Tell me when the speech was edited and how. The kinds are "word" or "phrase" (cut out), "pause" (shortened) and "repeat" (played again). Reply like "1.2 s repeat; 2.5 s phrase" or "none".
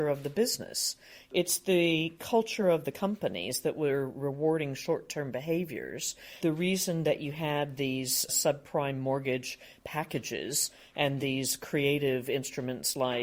none